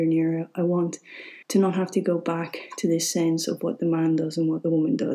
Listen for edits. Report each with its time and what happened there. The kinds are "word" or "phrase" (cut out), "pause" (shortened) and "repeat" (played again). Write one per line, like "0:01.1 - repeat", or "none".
0:01.4 - pause